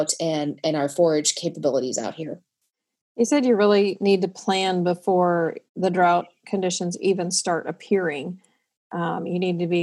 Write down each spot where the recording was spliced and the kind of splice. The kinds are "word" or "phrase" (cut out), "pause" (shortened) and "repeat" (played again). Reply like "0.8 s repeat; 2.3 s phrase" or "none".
5.7 s pause